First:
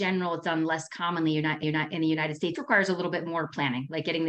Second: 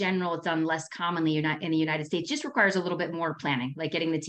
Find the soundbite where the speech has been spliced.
first; 2 cuts; at 1.6 s, 2.5 s

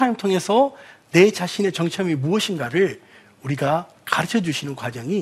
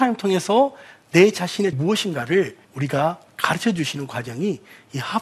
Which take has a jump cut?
second; 2 cuts; at 1.7 s, 2.6 s

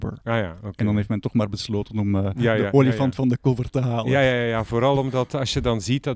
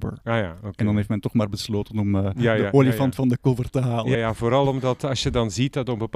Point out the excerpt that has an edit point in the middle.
second; 1 cut; at 4.1 s

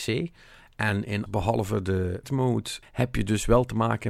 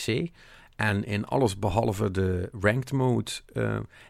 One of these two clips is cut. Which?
first; 3 cuts; at 1.3 s, 2.2 s, 2.8 s

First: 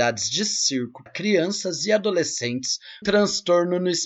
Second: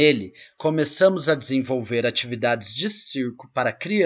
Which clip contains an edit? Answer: first; 2 cuts; at 1.1 s, 3.0 s

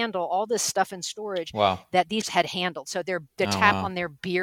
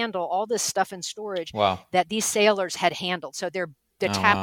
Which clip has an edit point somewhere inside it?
first; 2 cuts; at 2.2 s, 3.3 s

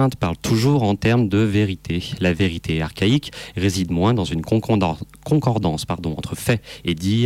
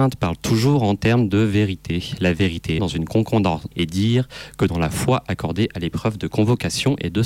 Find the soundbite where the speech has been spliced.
second; 2 cuts; at 2.8 s, 3.7 s

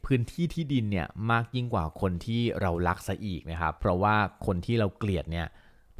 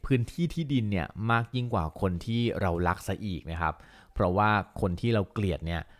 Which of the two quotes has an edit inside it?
first; 1 cut; at 3.8 s

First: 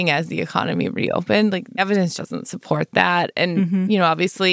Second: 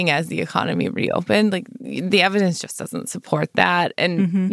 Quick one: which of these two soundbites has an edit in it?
first; 2 cuts; at 1.8 s, 2.2 s

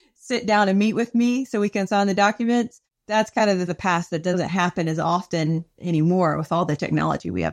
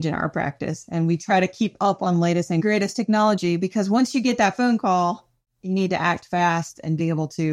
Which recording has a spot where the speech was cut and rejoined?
first; 2 cuts; at 3.7 s, 5.7 s

